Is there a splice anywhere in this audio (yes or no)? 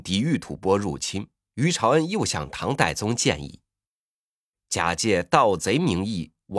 no